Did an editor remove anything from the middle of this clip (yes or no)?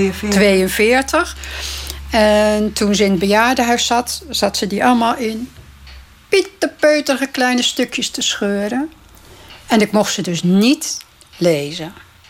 no